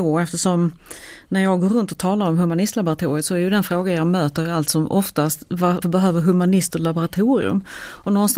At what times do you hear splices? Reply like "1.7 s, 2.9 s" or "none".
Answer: 5.8 s